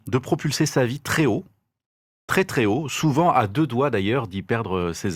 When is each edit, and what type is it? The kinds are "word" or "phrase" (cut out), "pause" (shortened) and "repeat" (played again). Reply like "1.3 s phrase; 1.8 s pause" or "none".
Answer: none